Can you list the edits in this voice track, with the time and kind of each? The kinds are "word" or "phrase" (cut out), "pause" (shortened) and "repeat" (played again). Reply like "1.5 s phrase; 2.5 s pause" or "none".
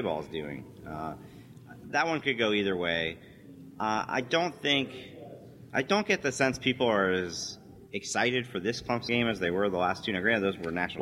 7.9 s pause; 9.1 s word